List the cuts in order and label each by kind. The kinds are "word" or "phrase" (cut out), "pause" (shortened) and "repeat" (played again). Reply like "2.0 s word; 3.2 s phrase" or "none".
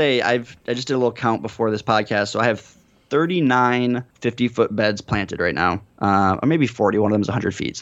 4.1 s pause; 5.9 s pause